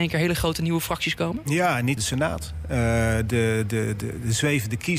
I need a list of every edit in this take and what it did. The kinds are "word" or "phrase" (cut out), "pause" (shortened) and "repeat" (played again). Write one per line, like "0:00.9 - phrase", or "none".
0:02.0 - phrase